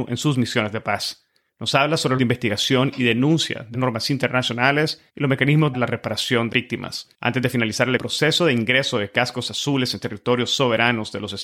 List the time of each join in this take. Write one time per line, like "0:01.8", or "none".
0:01.5
0:02.2
0:03.7
0:05.1
0:05.7
0:06.5
0:07.1
0:08.0